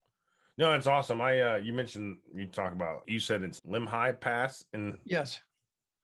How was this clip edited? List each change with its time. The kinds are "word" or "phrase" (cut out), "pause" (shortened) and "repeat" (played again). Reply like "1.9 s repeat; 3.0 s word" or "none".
2.3 s word; 3.0 s word; 3.6 s word